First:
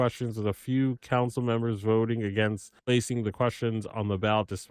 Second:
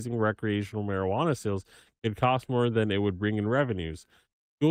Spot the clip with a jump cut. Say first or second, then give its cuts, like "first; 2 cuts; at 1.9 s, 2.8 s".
first; 1 cut; at 2.8 s